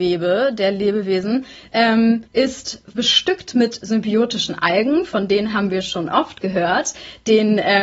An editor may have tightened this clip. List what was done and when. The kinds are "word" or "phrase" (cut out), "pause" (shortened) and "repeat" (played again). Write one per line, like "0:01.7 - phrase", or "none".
0:02.3 - pause